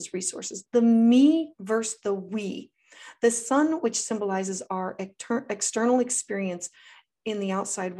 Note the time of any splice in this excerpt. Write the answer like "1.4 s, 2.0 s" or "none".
none